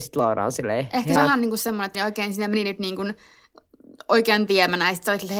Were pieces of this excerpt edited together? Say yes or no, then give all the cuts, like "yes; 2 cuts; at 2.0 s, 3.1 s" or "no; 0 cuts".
yes; 3 cuts; at 1.2 s, 1.9 s, 4.5 s